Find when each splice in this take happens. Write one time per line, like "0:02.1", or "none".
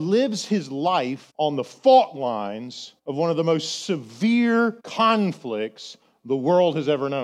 0:01.3
0:03.0
0:04.8